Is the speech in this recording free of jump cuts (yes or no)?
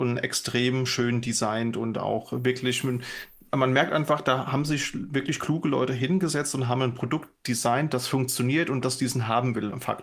yes